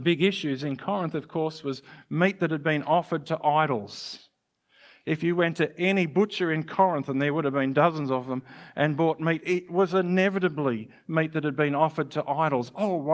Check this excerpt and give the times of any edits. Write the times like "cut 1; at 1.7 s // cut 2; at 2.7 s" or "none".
none